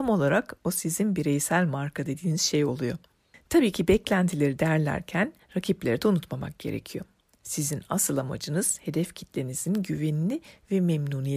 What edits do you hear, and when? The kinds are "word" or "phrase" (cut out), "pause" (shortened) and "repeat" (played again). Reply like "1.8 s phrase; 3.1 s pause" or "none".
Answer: none